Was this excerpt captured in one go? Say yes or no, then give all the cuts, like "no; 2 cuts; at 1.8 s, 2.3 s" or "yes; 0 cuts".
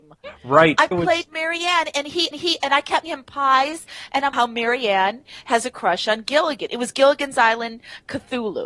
no; 4 cuts; at 0.9 s, 2.3 s, 3.0 s, 4.3 s